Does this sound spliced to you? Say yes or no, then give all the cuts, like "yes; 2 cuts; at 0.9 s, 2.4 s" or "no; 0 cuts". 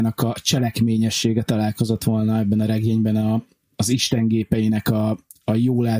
no; 0 cuts